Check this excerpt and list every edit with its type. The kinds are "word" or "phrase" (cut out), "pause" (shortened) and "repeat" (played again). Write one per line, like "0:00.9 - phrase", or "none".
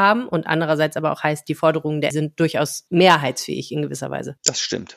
0:02.1 - word